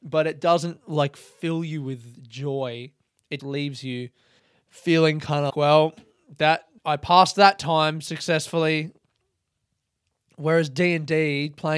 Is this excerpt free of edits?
no; 4 cuts; at 3.4 s, 4.4 s, 5.5 s, 6.8 s

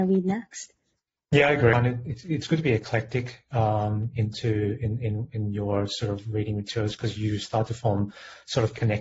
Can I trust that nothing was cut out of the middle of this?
yes; 0 cuts

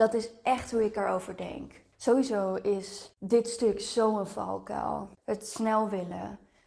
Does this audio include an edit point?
no; 0 cuts

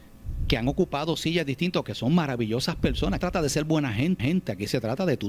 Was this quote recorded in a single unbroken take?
no; 2 cuts; at 3.2 s, 4.2 s

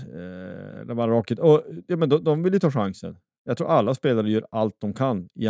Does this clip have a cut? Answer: no; 0 cuts

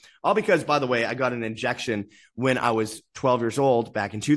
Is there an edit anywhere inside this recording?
no; 0 cuts

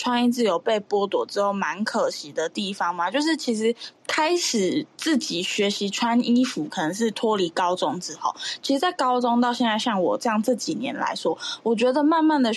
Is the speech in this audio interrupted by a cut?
yes; 1 cut; at 4.0 s

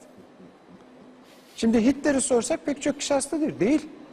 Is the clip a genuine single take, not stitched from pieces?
yes; 0 cuts

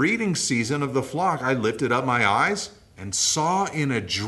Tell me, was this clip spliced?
no; 0 cuts

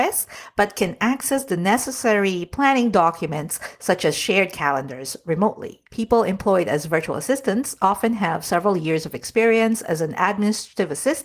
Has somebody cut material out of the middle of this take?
yes; 1 cut; at 5.9 s

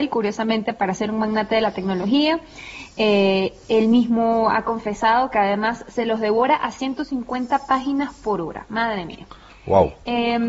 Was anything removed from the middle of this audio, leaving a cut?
no; 0 cuts

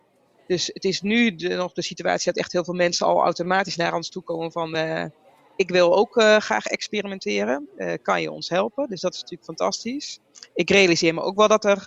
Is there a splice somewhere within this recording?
no; 0 cuts

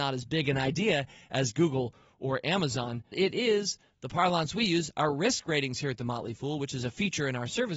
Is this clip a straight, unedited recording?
no; 1 cut; at 3.1 s

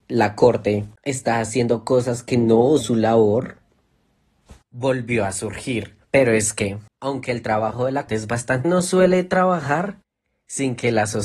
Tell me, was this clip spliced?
yes; 7 cuts; at 1.0 s, 2.8 s, 4.6 s, 6.0 s, 6.9 s, 8.1 s, 8.6 s

